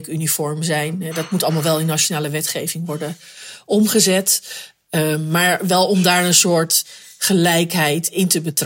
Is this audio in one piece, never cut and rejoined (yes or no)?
yes